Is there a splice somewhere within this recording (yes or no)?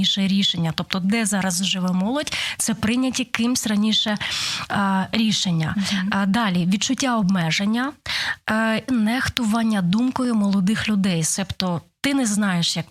yes